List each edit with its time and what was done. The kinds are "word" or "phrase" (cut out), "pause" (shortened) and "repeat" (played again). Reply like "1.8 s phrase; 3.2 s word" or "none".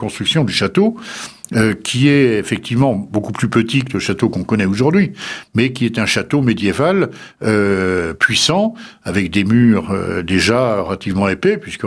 none